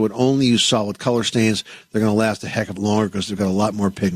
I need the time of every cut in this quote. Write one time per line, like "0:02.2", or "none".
0:02.8